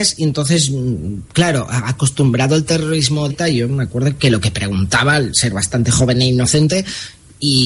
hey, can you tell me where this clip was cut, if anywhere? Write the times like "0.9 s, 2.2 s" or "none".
1.3 s, 3.3 s